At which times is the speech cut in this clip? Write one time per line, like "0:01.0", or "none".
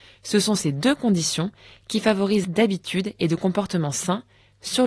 0:02.4